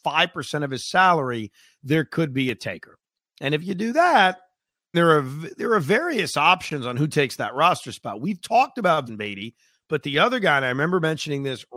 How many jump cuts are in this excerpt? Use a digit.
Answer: 2